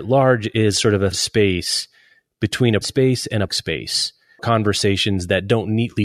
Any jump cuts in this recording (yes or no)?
yes